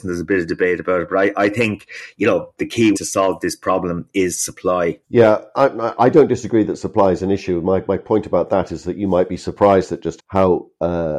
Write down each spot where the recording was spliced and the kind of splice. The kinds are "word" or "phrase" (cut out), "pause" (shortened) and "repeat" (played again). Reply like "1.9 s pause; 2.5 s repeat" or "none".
2.9 s word; 5.0 s pause; 10.2 s word